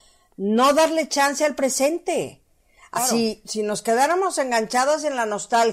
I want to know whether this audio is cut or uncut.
cut